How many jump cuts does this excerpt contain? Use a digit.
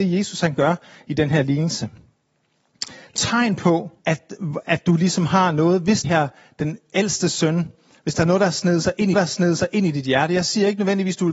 4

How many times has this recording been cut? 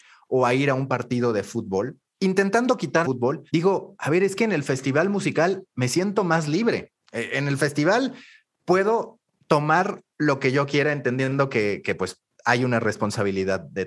3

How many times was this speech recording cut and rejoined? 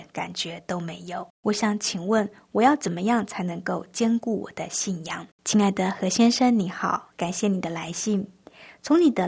2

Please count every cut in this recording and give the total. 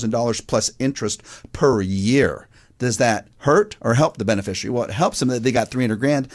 1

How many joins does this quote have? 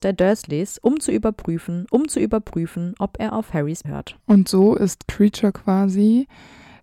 3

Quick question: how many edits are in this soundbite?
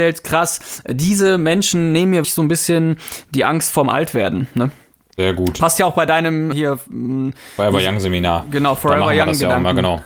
2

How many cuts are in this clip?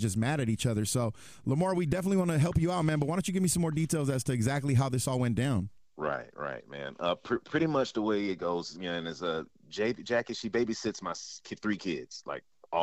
0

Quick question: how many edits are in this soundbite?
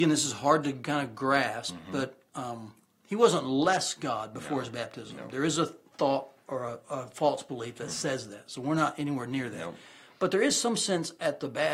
0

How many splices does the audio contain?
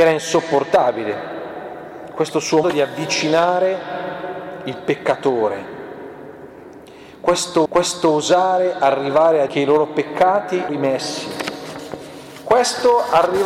4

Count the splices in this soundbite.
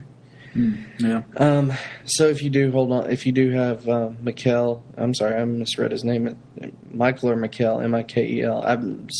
0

